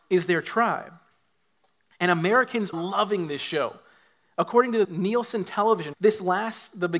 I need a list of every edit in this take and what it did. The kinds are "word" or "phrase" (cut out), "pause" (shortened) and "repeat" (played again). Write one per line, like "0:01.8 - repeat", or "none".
0:02.7 - word
0:04.8 - word
0:05.9 - word